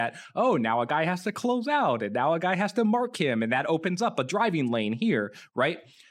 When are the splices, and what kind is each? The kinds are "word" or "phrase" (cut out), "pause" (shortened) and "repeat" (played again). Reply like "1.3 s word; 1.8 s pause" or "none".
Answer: none